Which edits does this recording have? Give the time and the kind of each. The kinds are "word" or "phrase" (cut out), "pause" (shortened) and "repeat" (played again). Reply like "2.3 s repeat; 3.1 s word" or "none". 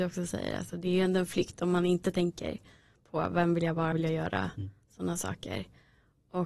3.9 s word